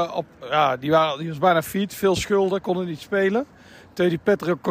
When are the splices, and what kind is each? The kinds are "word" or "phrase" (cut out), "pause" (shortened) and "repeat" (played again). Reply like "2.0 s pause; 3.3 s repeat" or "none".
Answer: none